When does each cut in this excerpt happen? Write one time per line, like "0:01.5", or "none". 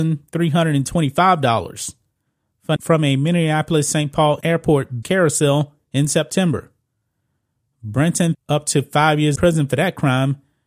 0:02.8
0:04.4
0:05.0
0:08.3
0:09.4